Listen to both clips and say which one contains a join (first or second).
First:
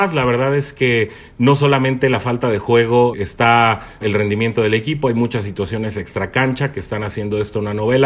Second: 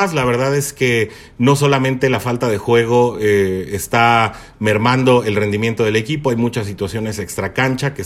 first